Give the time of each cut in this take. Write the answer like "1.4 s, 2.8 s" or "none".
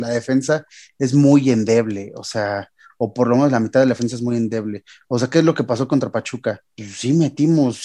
none